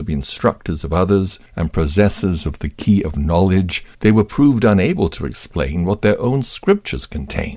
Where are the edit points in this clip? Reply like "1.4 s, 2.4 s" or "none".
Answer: 1.5 s, 3.9 s

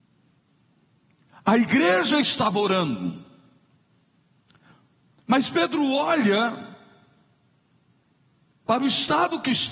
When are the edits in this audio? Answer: none

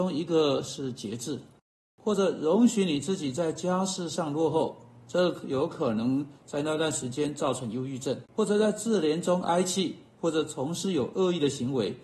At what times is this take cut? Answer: 8.3 s

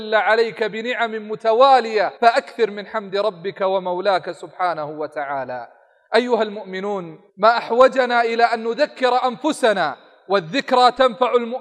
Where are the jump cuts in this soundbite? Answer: 2.2 s, 7.3 s

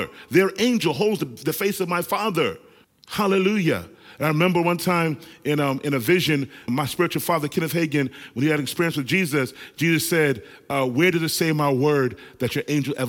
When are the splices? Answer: 2.8 s, 6.7 s

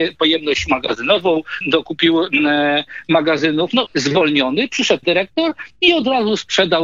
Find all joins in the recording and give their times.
1.6 s, 3.9 s, 5.0 s

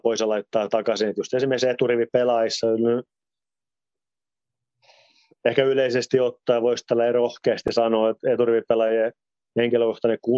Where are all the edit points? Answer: none

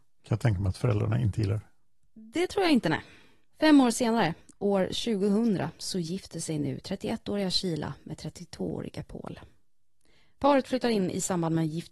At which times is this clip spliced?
none

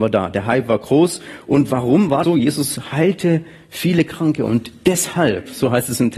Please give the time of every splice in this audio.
2.2 s

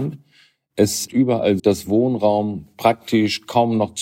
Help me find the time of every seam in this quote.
1.1 s, 1.6 s

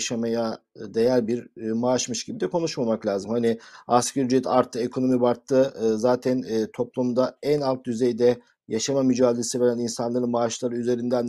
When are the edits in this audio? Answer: none

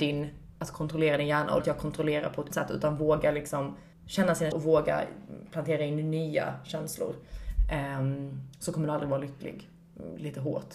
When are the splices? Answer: 1.6 s, 2.5 s, 3.9 s, 4.5 s

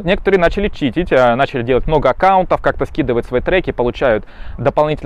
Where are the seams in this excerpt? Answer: none

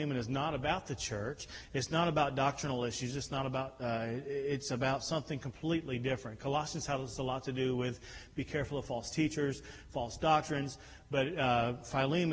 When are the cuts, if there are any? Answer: none

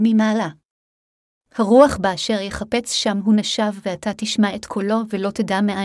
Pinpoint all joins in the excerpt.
none

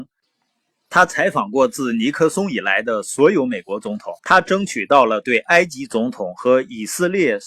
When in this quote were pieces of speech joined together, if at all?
4.2 s

